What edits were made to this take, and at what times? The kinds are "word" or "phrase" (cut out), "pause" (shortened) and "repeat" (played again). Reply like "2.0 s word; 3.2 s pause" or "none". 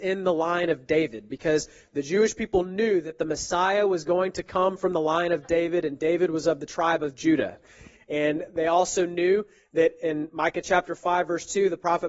none